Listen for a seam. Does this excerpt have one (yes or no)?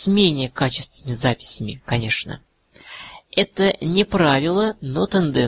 no